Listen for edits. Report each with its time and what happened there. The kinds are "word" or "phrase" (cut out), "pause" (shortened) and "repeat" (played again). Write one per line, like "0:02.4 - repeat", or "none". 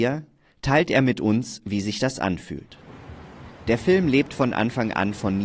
none